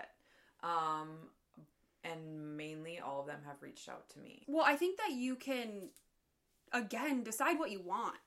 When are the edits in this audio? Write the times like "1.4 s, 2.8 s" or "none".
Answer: none